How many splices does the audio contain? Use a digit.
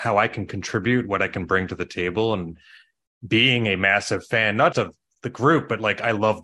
1